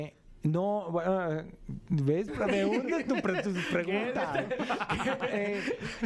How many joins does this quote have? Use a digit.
1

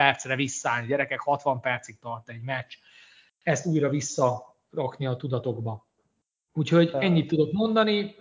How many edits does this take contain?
0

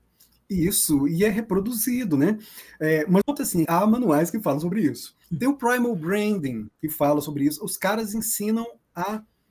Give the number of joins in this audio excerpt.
3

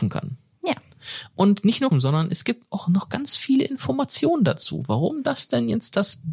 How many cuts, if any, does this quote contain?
1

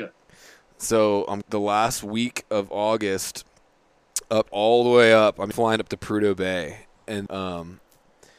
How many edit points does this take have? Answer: 4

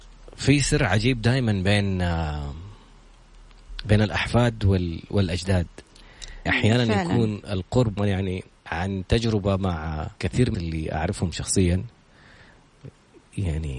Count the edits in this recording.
5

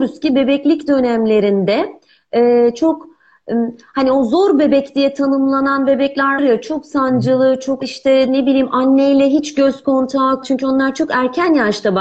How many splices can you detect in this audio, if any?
3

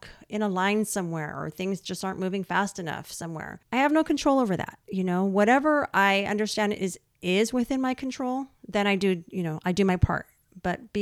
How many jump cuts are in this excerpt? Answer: 2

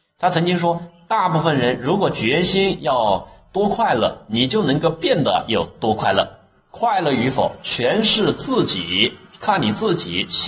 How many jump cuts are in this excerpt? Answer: 0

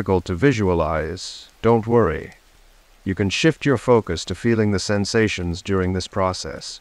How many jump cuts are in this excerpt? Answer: 1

